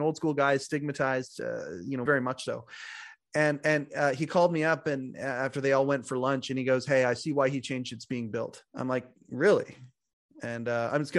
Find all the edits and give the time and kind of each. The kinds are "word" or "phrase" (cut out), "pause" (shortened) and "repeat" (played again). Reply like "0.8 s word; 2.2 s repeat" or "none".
2.1 s word; 8.7 s pause